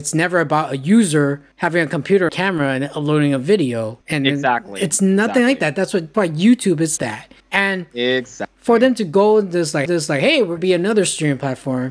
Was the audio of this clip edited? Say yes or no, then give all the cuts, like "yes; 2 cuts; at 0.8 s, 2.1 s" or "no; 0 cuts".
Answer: yes; 8 cuts; at 1.5 s, 2.3 s, 4.0 s, 6.1 s, 7.0 s, 7.4 s, 9.9 s, 10.6 s